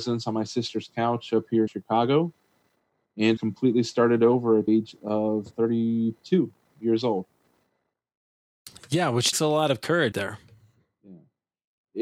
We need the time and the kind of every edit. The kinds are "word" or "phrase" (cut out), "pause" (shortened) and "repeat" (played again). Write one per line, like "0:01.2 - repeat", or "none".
0:01.7 - word
0:03.4 - word
0:04.7 - word
0:05.5 - word
0:09.3 - word
0:10.1 - word